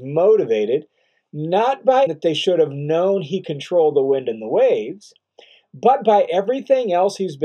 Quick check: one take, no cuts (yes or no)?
no